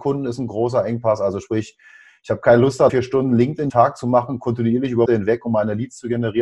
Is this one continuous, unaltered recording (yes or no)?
no